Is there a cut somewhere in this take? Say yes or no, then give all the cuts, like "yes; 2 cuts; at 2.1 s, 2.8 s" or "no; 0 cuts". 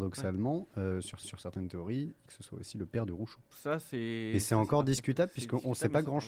yes; 2 cuts; at 1.2 s, 2.3 s